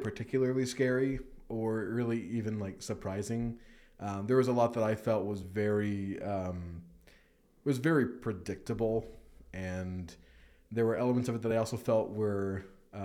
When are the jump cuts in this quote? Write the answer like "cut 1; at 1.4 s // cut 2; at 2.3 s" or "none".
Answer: none